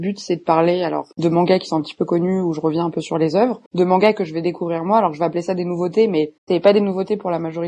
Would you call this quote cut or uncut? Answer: cut